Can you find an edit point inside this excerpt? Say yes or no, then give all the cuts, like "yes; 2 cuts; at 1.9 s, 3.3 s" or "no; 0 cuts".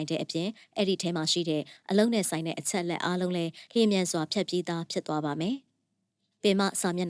no; 0 cuts